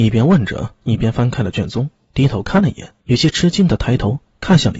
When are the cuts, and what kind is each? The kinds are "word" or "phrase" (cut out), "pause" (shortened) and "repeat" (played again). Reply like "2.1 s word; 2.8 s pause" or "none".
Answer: 3.0 s pause